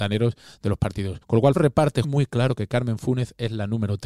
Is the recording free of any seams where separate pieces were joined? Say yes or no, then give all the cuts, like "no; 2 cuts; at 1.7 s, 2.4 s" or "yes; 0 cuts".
no; 3 cuts; at 1.2 s, 1.5 s, 2.0 s